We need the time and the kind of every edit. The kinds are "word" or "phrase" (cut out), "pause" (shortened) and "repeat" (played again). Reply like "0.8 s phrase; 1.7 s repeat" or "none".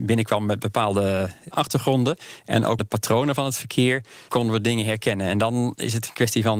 1.5 s word; 2.8 s word; 4.3 s word